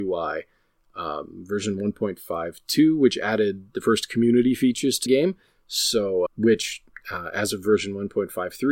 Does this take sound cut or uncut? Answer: cut